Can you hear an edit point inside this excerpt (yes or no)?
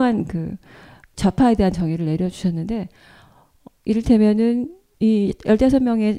no